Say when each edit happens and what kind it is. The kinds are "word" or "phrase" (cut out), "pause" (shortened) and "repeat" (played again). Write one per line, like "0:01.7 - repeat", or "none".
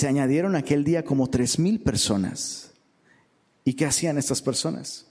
none